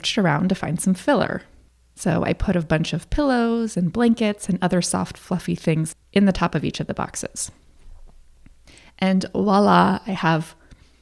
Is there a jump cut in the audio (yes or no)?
no